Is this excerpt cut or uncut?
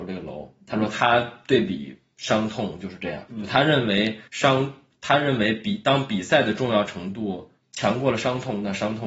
cut